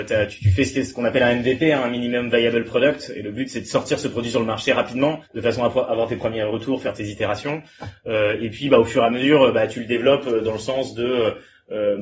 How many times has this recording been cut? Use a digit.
1